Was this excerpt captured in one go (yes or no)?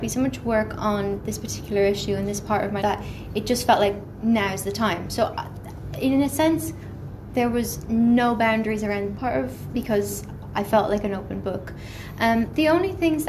no